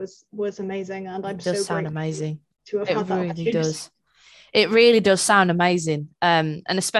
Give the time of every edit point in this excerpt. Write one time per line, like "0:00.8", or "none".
0:02.6